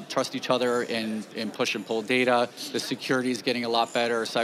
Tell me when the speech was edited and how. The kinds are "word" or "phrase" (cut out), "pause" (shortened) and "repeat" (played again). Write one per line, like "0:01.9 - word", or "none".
none